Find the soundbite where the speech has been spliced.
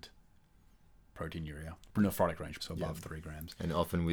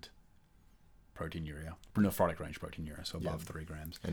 first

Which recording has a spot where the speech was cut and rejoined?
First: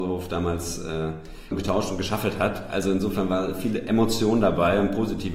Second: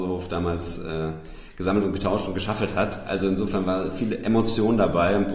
first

